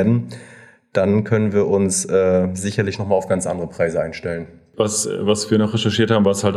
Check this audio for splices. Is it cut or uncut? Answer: uncut